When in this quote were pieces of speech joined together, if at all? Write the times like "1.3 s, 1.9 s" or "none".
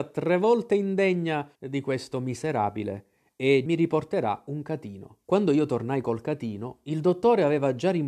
1.5 s, 3.7 s, 5.2 s